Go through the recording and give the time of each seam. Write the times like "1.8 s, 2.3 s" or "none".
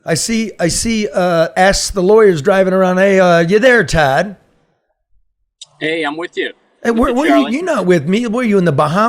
none

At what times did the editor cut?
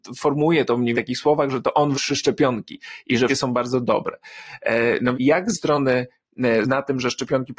0.9 s, 1.9 s, 3.3 s, 5.1 s, 5.5 s, 6.6 s

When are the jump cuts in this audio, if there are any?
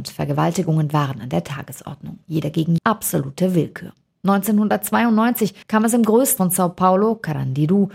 2.2 s, 2.8 s, 5.6 s, 6.4 s

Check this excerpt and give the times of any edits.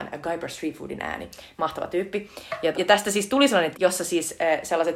2.7 s, 3.7 s

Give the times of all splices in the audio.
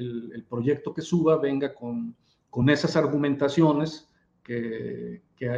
none

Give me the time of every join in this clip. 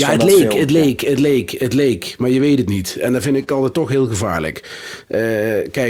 none

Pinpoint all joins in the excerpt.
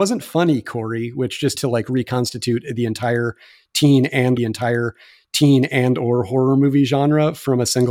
1.5 s, 4.4 s

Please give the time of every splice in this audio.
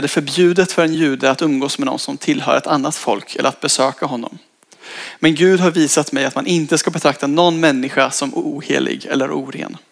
none

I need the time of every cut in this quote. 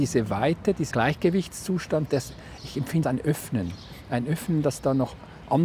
0.9 s, 3.0 s

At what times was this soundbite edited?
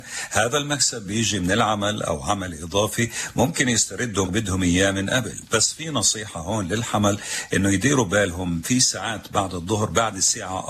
4.3 s

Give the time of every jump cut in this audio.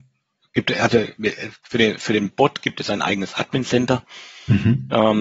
none

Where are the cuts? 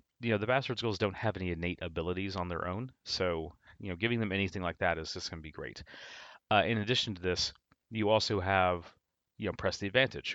none

